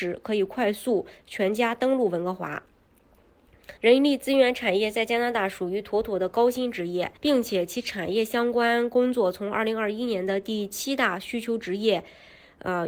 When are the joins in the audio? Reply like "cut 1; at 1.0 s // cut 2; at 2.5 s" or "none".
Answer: cut 1; at 3.8 s // cut 2; at 7.2 s

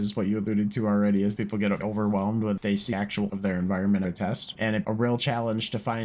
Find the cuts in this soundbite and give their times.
cut 1; at 1.4 s // cut 2; at 1.8 s // cut 3; at 2.9 s // cut 4; at 3.3 s // cut 5; at 4.0 s // cut 6; at 4.8 s

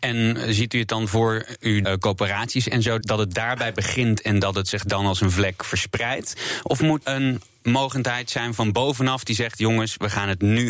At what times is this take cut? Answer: cut 1; at 1.8 s // cut 2; at 3.0 s // cut 3; at 7.0 s

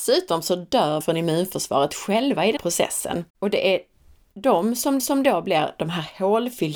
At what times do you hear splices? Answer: cut 1; at 1.0 s // cut 2; at 2.6 s // cut 3; at 3.3 s // cut 4; at 5.0 s

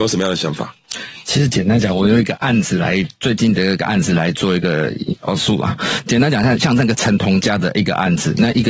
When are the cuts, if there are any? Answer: cut 1; at 5.2 s

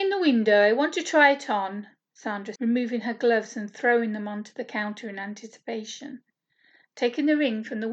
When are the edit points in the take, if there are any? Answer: cut 1; at 2.6 s

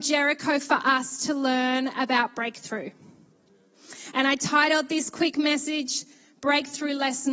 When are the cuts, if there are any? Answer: none

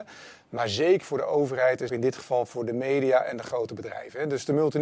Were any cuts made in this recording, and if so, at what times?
cut 1; at 1.0 s // cut 2; at 1.9 s

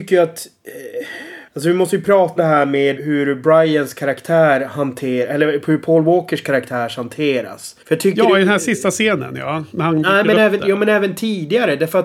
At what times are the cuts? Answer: cut 1; at 1.5 s // cut 2; at 2.4 s // cut 3; at 3.0 s // cut 4; at 7.8 s

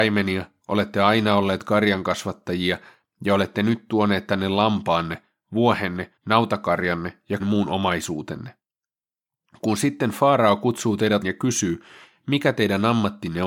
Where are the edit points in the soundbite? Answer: cut 1; at 6.2 s // cut 2; at 7.4 s // cut 3; at 11.2 s

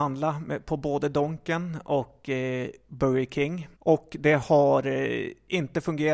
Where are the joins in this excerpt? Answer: cut 1; at 3.8 s

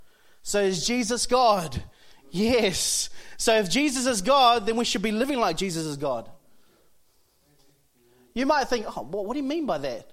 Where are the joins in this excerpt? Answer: none

